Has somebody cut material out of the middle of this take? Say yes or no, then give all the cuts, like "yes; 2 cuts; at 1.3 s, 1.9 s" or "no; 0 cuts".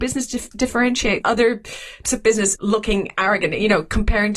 yes; 3 cuts; at 1.2 s, 2.0 s, 2.6 s